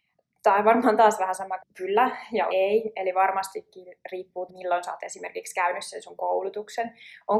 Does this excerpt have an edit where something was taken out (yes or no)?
yes